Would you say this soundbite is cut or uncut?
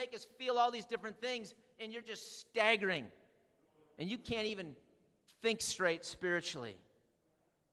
uncut